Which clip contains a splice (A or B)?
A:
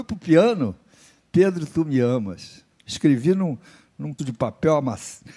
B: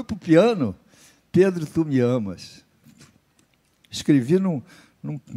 A